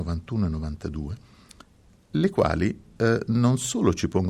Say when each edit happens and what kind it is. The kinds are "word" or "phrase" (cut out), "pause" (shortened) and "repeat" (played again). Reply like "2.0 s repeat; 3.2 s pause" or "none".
none